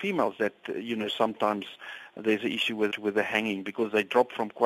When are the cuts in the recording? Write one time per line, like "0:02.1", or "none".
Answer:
0:02.9